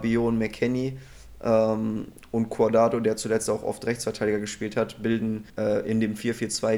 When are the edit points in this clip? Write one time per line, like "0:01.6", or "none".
0:05.5